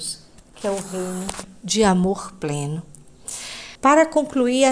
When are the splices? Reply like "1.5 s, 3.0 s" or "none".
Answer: 3.8 s